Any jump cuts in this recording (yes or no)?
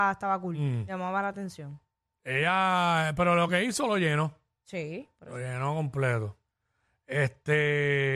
no